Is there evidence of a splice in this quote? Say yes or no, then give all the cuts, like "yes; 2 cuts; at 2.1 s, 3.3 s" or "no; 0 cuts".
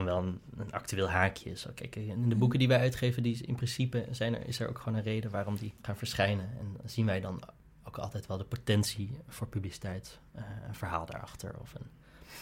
no; 0 cuts